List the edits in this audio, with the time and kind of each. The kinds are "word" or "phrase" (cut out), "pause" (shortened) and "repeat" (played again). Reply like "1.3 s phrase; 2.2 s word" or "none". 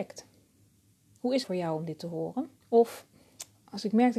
1.4 s word; 2.6 s pause